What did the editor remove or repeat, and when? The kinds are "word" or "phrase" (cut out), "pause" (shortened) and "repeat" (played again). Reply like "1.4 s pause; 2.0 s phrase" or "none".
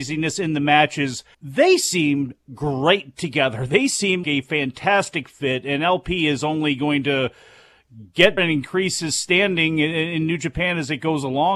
1.3 s pause; 4.2 s word; 8.4 s word